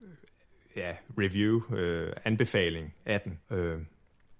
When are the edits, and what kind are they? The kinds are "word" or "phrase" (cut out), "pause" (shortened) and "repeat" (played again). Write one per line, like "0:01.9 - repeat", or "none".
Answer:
0:03.4 - pause